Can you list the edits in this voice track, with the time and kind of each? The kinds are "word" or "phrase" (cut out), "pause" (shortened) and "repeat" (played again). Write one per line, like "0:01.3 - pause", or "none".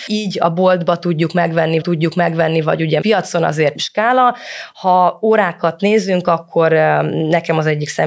0:01.8 - repeat
0:03.0 - word
0:03.7 - phrase